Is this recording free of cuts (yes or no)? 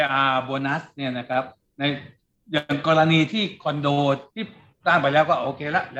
no